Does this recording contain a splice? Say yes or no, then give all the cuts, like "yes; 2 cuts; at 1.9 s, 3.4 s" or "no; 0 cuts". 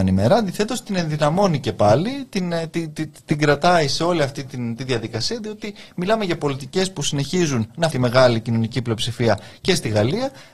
yes; 1 cut; at 7.9 s